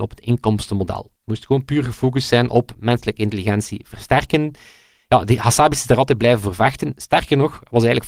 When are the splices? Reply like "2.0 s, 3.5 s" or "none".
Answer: 1.2 s